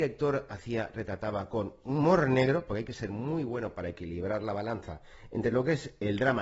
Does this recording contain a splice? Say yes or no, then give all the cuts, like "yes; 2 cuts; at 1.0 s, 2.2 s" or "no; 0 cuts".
no; 0 cuts